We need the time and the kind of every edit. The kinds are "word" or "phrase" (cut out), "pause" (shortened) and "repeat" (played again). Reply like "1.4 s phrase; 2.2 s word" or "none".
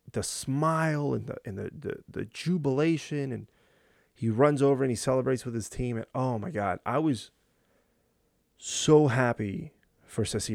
none